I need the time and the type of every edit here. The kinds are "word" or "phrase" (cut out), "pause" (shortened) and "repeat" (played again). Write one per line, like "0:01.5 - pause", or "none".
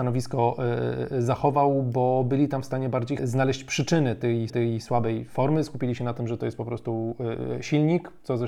0:03.2 - word
0:04.5 - repeat